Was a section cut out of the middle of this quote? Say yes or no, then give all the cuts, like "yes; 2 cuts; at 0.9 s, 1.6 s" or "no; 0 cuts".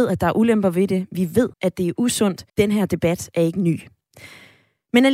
yes; 2 cuts; at 1.5 s, 2.5 s